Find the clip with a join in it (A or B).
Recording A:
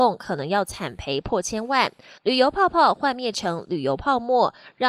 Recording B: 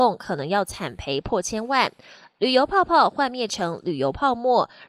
A